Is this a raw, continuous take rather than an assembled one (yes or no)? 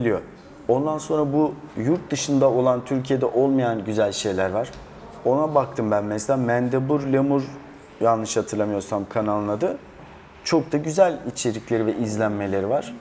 yes